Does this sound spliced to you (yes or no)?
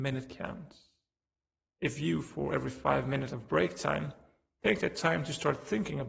no